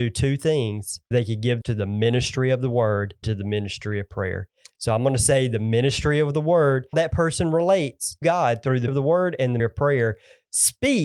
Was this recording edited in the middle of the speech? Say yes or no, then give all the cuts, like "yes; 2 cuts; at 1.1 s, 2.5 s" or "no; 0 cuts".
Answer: yes; 7 cuts; at 1.1 s, 1.6 s, 3.2 s, 6.9 s, 8.2 s, 8.9 s, 9.6 s